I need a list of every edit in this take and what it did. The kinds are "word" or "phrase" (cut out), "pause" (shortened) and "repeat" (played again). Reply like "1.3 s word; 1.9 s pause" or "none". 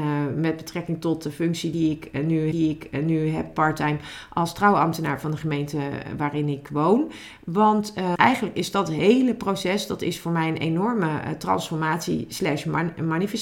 2.5 s repeat; 8.1 s word